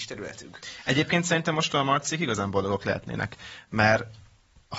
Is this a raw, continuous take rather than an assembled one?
yes; 0 cuts

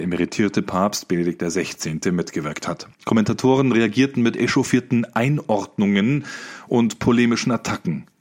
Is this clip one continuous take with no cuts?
no; 1 cut; at 2.9 s

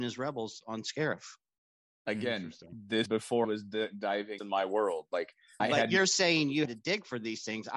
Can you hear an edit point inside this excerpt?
yes; 5 cuts; at 3.1 s, 3.4 s, 4.4 s, 5.6 s, 6.6 s

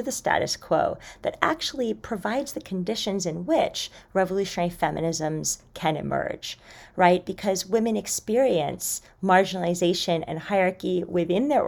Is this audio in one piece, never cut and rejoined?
yes; 0 cuts

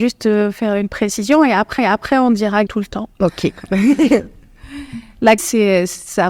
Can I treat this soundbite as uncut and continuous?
no; 4 cuts; at 1.8 s, 2.7 s, 3.1 s, 5.4 s

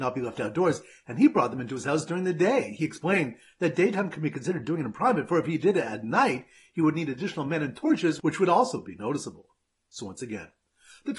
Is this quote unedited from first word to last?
yes; 0 cuts

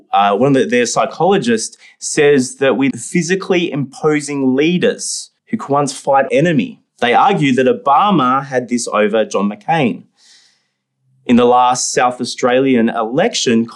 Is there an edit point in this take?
yes; 4 cuts; at 2.9 s, 5.4 s, 6.3 s, 6.9 s

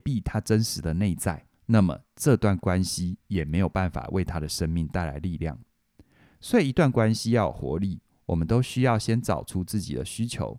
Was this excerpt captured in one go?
no; 1 cut; at 1.5 s

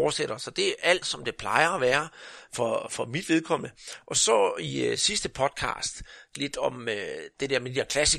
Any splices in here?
yes; 2 cuts; at 1.0 s, 6.3 s

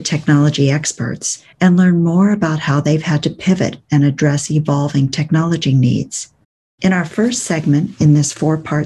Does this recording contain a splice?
yes; 1 cut; at 1.5 s

